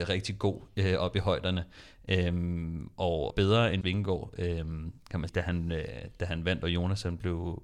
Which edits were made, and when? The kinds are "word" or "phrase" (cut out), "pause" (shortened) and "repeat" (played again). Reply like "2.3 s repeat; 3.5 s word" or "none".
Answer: 3.3 s phrase; 3.8 s word; 5.3 s word